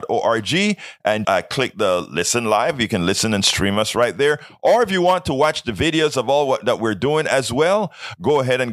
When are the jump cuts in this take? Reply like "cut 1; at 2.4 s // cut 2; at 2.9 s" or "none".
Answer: cut 1; at 1.2 s